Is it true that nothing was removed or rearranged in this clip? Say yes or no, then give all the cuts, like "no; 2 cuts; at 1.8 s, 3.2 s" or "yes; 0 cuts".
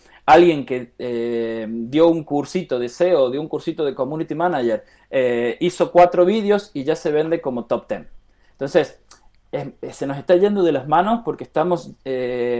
yes; 0 cuts